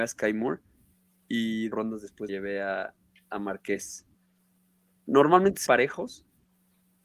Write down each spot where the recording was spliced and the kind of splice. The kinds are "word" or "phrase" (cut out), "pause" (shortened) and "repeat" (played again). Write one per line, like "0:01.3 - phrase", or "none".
0:01.7 - word
0:02.3 - word
0:05.7 - word